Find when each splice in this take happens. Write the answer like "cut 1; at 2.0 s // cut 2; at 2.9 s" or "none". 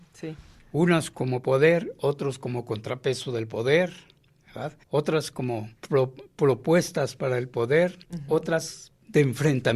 cut 1; at 4.8 s // cut 2; at 5.7 s // cut 3; at 8.0 s

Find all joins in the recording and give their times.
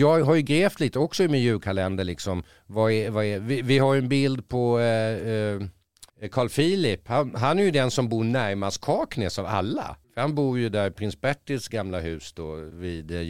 cut 1; at 6.1 s // cut 2; at 10.0 s

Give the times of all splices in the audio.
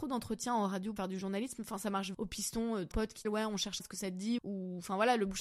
cut 1; at 1.0 s // cut 2; at 2.1 s // cut 3; at 2.9 s // cut 4; at 3.2 s // cut 5; at 3.8 s // cut 6; at 4.4 s

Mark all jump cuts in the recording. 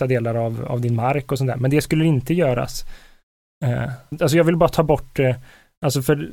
cut 1; at 4.1 s

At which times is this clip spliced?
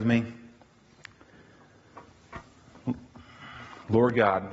none

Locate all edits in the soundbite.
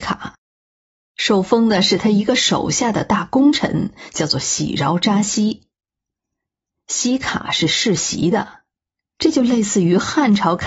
none

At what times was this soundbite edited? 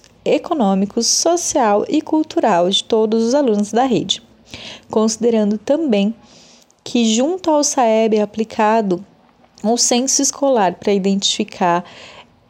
none

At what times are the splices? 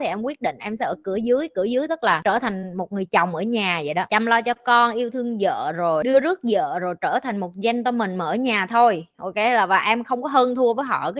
none

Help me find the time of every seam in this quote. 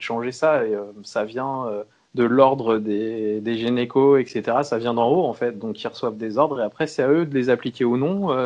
cut 1; at 1.9 s

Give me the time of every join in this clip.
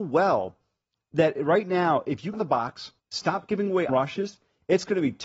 cut 1; at 2.3 s // cut 2; at 3.0 s // cut 3; at 3.9 s

